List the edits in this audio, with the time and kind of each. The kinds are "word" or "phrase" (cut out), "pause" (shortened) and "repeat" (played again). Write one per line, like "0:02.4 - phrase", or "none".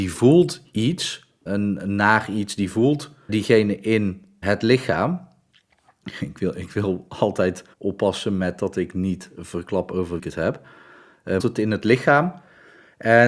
0:01.5 - word
0:03.3 - word
0:04.4 - word
0:07.7 - pause
0:10.2 - word
0:11.4 - phrase

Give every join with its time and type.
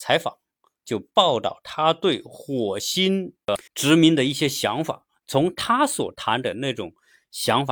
0:03.7 - pause

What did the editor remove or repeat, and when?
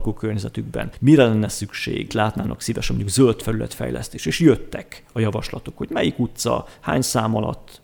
0:02.1 - word

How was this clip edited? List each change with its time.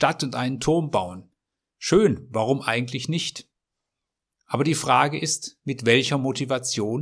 none

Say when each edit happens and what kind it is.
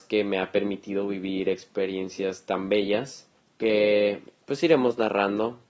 0:03.4 - pause

